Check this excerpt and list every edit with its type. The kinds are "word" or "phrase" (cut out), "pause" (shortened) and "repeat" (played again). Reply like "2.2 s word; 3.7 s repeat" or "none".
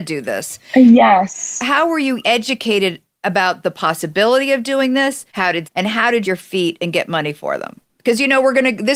2.2 s word; 5.3 s pause; 5.6 s phrase; 6.2 s phrase